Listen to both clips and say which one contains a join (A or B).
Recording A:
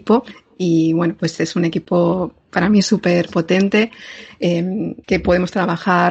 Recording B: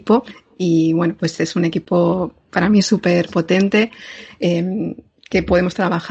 A